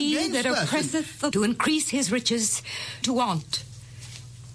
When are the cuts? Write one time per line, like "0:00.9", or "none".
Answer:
0:01.3
0:03.0